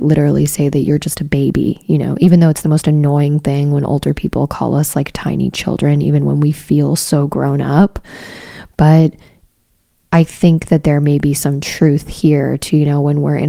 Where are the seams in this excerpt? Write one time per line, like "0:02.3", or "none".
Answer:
none